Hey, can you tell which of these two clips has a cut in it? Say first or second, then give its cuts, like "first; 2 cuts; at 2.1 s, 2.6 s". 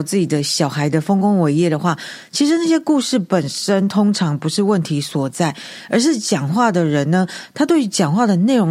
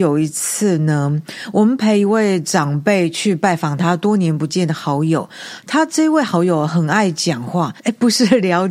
second; 1 cut; at 7.8 s